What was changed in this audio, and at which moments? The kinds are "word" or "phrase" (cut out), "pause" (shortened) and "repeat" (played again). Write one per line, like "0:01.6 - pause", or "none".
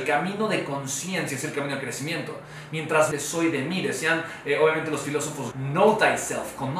0:03.1 - phrase
0:05.5 - word

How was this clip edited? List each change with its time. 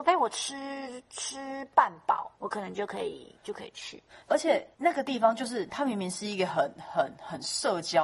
0:02.4 - pause
0:03.4 - pause
0:04.2 - pause
0:04.7 - pause
0:05.7 - word

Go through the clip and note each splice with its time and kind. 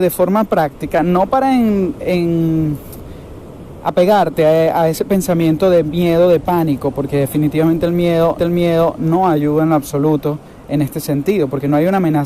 0:08.4 - repeat

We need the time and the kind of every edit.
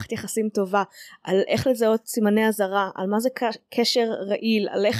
none

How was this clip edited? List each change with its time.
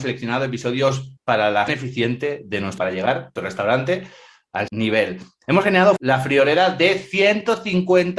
0:01.2 - word
0:01.7 - word
0:02.8 - word
0:03.4 - word
0:04.7 - word
0:06.0 - word

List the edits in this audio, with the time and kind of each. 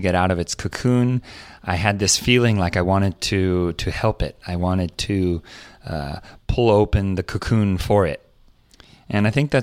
none

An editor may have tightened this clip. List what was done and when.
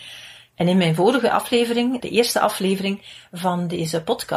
0:02.0 - word

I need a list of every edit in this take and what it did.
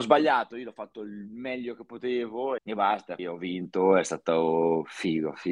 0:02.6 - word
0:03.2 - word

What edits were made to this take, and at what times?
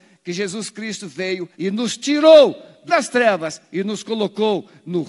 0:01.5 - pause
0:02.9 - word

